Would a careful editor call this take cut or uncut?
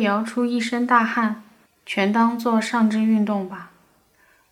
cut